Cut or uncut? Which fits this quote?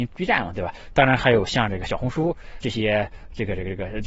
cut